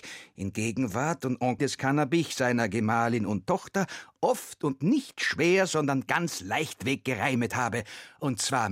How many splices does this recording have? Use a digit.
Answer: 1